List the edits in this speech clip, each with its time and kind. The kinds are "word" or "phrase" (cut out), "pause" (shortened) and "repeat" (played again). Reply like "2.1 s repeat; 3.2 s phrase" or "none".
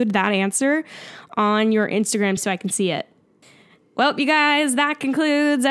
2.4 s word

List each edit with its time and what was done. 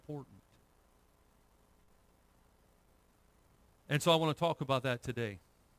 none

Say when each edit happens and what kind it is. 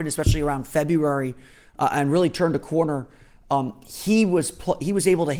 none

